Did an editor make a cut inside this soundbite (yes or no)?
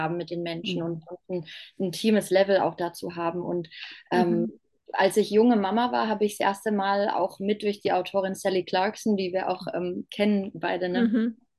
no